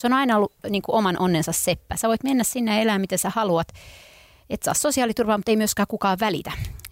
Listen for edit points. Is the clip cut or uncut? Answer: uncut